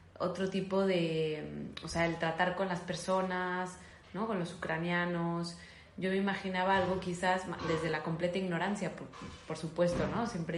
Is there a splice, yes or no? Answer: no